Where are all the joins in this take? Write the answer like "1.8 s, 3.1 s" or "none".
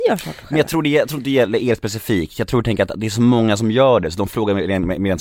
none